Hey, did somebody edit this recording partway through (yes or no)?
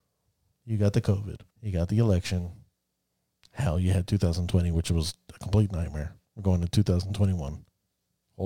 yes